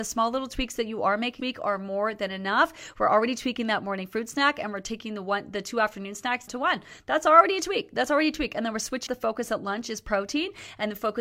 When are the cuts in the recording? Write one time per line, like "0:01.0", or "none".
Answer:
0:01.4
0:06.5
0:09.1